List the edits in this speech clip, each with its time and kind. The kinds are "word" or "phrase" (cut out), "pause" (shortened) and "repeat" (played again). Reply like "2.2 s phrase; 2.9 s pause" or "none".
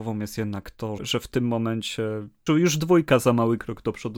1.0 s word; 2.5 s word